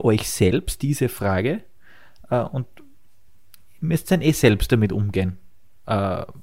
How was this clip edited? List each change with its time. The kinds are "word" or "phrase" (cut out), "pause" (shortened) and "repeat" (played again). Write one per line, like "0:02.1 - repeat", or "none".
none